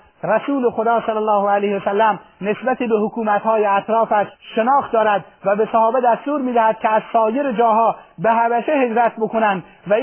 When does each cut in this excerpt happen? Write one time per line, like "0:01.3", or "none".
0:04.3